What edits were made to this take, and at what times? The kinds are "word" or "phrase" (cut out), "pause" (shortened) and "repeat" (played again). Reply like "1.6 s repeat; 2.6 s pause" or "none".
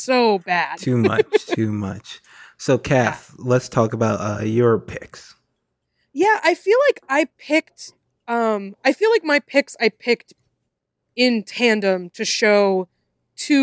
none